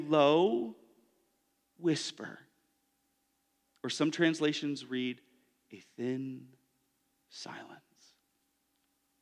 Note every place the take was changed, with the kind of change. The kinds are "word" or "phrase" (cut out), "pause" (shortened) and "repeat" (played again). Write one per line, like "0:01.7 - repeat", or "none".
none

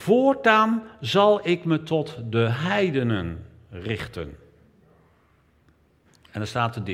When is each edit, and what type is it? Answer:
none

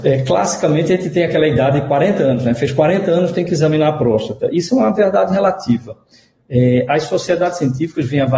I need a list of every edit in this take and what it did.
none

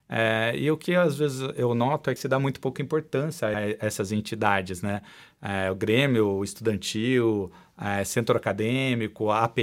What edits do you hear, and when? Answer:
0:02.2 - phrase
0:03.5 - word

